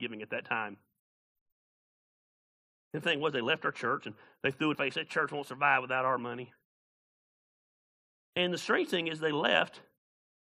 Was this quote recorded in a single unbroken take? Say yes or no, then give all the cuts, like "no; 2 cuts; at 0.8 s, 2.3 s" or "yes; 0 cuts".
no; 2 cuts; at 3.0 s, 4.7 s